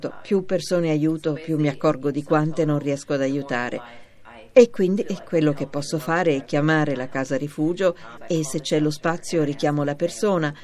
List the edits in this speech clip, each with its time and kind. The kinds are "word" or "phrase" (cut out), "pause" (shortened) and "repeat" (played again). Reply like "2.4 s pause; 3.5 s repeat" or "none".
none